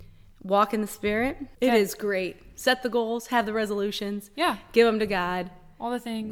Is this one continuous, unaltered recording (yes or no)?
no